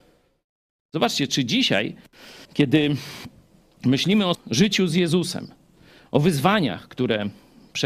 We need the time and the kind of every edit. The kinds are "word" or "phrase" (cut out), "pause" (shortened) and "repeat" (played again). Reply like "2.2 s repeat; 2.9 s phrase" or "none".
2.4 s pause; 4.3 s phrase